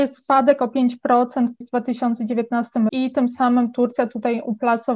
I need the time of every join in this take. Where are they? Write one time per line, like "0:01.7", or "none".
0:01.6
0:02.9